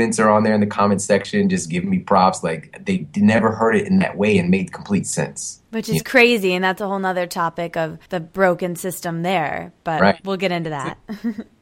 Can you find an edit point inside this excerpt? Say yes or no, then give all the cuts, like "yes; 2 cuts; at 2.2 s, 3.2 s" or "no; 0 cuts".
yes; 2 cuts; at 5.6 s, 8.1 s